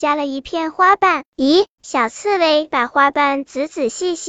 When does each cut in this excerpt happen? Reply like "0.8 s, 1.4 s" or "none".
1.3 s